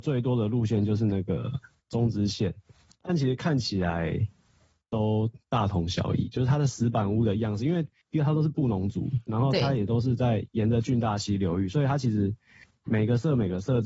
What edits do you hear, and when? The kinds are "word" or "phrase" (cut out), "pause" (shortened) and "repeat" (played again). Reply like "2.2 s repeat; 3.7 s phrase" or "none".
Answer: 5.4 s pause